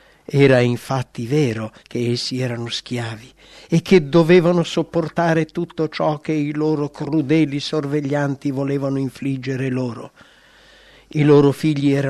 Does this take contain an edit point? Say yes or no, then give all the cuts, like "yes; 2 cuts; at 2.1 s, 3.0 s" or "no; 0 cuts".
yes; 1 cut; at 1.8 s